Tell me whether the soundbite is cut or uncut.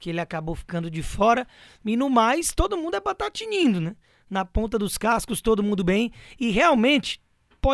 uncut